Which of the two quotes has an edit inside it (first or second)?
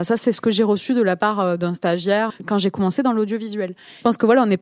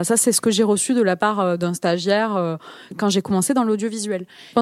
first